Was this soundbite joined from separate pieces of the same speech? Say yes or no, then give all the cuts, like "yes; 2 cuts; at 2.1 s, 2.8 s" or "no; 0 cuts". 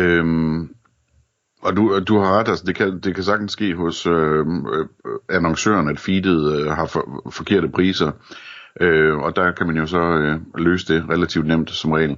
no; 0 cuts